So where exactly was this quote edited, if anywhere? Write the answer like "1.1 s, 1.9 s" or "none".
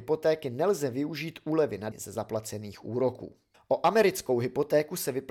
1.9 s, 3.5 s